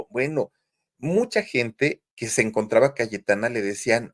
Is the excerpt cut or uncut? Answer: cut